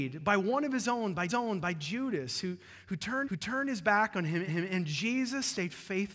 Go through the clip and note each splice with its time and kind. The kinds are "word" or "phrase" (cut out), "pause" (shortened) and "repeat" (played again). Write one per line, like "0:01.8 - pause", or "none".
0:01.3 - repeat
0:03.2 - repeat
0:04.5 - repeat